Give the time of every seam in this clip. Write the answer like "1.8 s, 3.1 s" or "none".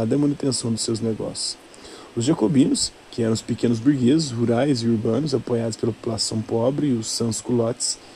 3.0 s